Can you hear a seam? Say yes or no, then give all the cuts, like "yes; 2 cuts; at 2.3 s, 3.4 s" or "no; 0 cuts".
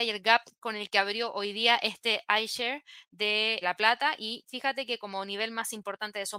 yes; 1 cut; at 3.6 s